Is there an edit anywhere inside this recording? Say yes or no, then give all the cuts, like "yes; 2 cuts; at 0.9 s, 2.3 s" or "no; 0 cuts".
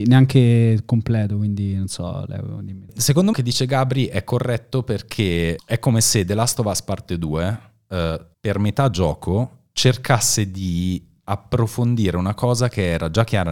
yes; 3 cuts; at 3.3 s, 5.6 s, 8.3 s